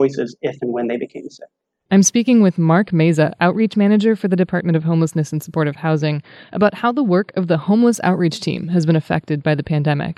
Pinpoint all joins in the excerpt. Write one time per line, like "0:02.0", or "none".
none